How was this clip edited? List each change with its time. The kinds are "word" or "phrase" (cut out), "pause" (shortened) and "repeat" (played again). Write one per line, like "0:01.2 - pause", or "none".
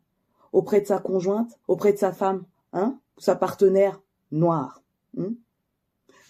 0:01.6 - pause
0:02.5 - pause
0:05.0 - pause